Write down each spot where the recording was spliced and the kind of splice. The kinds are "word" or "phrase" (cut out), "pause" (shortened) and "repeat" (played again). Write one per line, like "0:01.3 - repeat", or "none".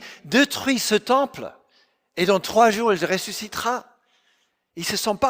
none